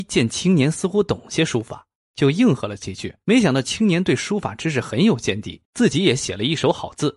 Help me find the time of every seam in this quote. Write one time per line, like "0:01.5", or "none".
0:03.2
0:05.6